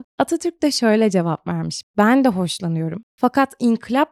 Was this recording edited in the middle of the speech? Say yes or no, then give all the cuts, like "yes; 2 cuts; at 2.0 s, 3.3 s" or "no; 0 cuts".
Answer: no; 0 cuts